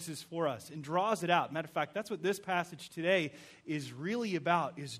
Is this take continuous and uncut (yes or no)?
yes